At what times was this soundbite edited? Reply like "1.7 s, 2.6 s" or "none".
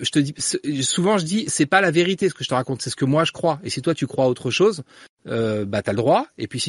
none